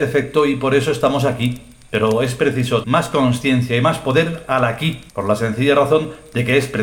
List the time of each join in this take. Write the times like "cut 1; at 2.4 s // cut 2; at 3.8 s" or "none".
cut 1; at 2.8 s // cut 2; at 5.1 s